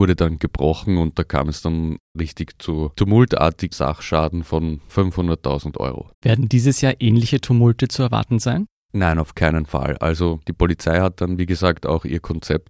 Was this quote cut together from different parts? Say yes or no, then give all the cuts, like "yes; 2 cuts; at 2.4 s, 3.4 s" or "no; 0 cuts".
yes; 3 cuts; at 3.7 s, 4.9 s, 6.1 s